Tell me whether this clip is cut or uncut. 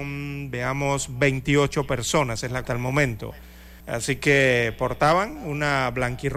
cut